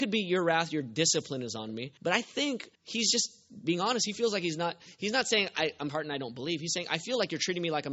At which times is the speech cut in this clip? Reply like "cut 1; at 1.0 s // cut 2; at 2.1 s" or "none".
cut 1; at 2.0 s // cut 2; at 2.7 s // cut 3; at 5.9 s